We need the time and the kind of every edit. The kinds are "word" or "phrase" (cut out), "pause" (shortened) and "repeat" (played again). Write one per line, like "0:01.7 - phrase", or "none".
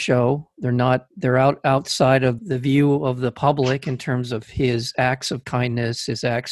0:02.4 - word